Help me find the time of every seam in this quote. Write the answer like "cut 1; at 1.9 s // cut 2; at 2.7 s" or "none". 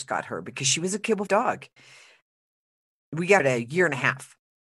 cut 1; at 1.3 s // cut 2; at 3.4 s

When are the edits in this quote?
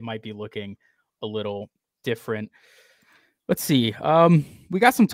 none

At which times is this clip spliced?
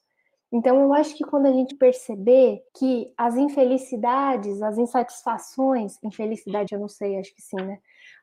cut 1; at 1.7 s // cut 2; at 2.7 s // cut 3; at 6.7 s

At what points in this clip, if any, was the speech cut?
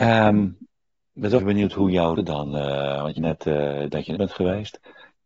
cut 1; at 1.4 s // cut 2; at 2.2 s // cut 3; at 3.2 s // cut 4; at 4.2 s

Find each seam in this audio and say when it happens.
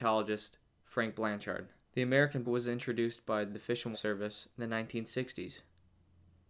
cut 1; at 2.4 s // cut 2; at 3.9 s

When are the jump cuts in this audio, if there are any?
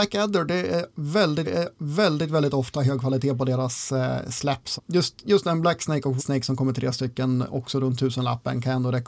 cut 1; at 1.4 s // cut 2; at 4.8 s // cut 3; at 6.2 s

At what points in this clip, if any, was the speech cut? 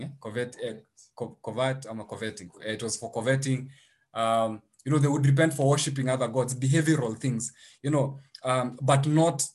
none

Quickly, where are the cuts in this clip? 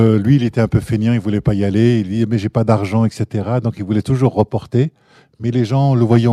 none

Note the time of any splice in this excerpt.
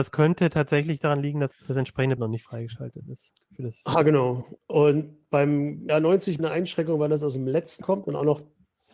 cut 1; at 1.5 s // cut 2; at 2.2 s // cut 3; at 4.6 s // cut 4; at 5.9 s // cut 5; at 6.4 s // cut 6; at 7.8 s

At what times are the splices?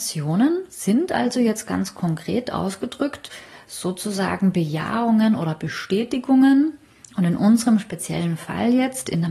none

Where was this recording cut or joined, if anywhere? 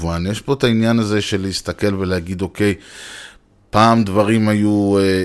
none

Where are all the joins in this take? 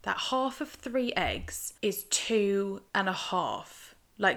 cut 1; at 1.8 s // cut 2; at 2.9 s

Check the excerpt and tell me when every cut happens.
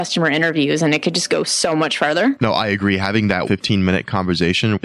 cut 1; at 3.4 s

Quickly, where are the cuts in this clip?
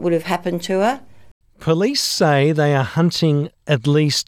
none

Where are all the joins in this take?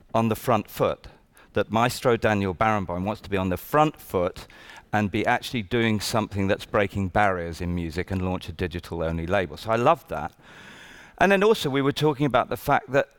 none

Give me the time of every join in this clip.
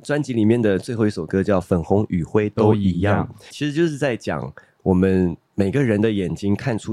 cut 1; at 3.5 s

